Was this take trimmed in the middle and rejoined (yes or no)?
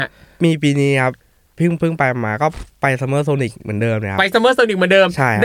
no